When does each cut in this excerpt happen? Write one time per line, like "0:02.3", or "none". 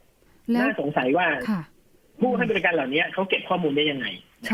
none